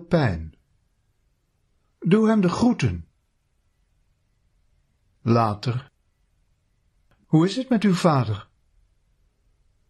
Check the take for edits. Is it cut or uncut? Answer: uncut